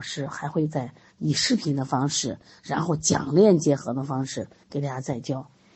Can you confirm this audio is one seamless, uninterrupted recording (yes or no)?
yes